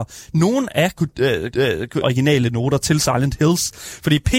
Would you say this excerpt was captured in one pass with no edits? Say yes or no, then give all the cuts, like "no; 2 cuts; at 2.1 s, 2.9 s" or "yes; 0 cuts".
no; 2 cuts; at 1.5 s, 2.0 s